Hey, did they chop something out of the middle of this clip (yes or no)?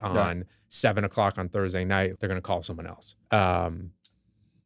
yes